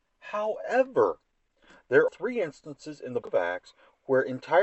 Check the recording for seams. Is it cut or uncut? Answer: cut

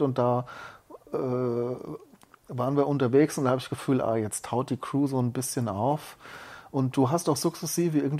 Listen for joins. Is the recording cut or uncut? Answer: uncut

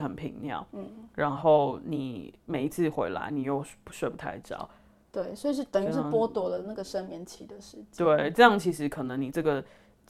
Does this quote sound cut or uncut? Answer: uncut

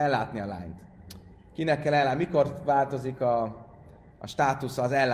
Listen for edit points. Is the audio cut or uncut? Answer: uncut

